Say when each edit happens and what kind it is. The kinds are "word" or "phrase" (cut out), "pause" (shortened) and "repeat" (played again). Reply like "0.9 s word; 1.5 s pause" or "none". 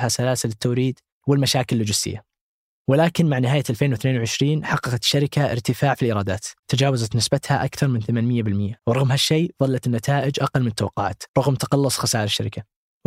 6.6 s pause; 8.8 s pause; 11.3 s pause